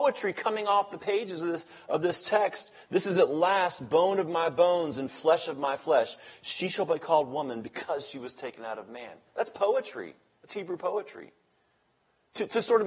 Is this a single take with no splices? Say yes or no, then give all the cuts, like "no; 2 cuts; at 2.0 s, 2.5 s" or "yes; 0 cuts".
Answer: yes; 0 cuts